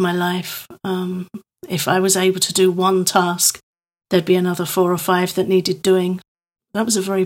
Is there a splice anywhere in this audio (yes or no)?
no